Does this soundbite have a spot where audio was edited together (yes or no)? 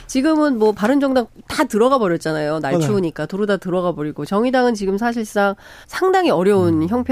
yes